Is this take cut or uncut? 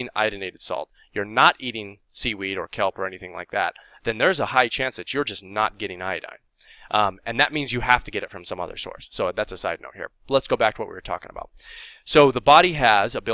uncut